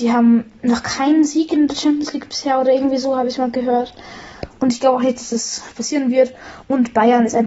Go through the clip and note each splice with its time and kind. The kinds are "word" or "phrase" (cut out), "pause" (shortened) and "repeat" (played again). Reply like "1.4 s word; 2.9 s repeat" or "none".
none